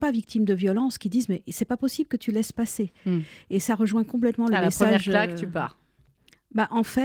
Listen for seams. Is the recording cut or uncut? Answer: uncut